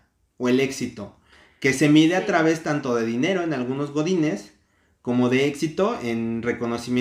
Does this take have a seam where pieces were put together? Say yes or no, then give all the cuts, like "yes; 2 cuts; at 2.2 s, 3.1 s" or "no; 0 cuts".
no; 0 cuts